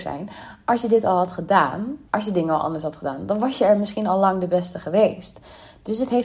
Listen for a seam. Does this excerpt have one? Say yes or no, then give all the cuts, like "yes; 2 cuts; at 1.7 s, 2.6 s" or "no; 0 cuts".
yes; 1 cut; at 2.1 s